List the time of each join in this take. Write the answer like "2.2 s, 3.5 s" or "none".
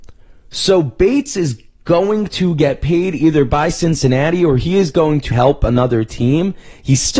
5.3 s

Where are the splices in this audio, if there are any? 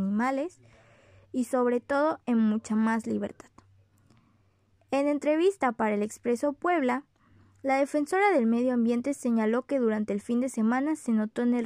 none

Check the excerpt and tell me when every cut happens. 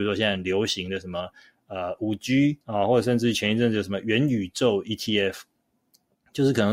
2.6 s

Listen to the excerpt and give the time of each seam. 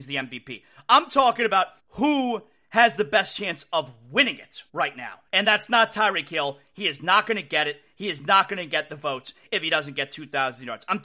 1.8 s, 4.7 s, 5.3 s

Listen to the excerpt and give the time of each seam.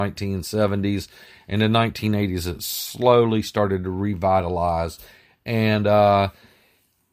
none

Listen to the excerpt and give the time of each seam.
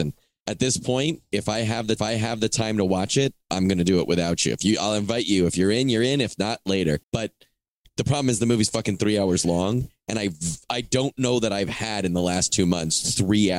2.0 s, 7.0 s

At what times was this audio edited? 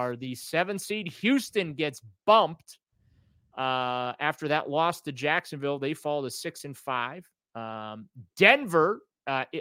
none

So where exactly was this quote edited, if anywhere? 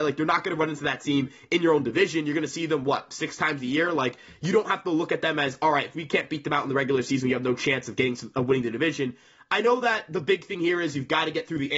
none

